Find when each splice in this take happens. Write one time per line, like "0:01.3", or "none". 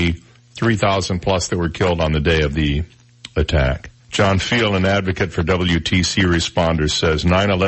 0:04.0